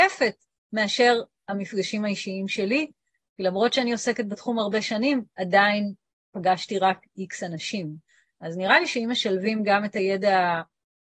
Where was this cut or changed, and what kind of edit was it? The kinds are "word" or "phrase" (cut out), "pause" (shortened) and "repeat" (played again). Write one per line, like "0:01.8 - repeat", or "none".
none